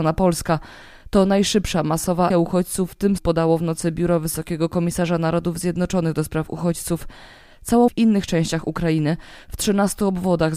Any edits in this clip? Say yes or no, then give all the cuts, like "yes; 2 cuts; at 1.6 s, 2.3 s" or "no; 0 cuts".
yes; 3 cuts; at 2.3 s, 3.2 s, 7.9 s